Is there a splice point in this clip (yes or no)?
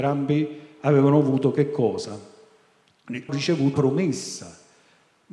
yes